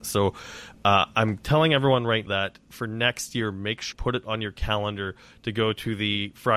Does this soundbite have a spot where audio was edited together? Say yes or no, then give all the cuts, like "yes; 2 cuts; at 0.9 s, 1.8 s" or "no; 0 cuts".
yes; 2 cuts; at 2.3 s, 3.9 s